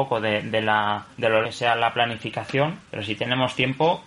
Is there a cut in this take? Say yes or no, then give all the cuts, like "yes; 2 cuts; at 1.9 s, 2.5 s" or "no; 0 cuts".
yes; 3 cuts; at 1.1 s, 1.4 s, 2.8 s